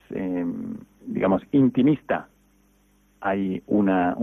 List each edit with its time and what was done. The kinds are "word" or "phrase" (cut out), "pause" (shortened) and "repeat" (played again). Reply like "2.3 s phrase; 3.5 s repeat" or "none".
none